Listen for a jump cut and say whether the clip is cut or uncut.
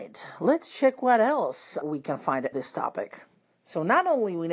cut